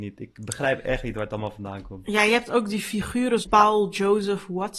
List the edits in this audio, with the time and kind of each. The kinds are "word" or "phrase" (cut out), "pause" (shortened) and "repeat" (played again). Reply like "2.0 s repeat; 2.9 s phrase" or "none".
3.4 s word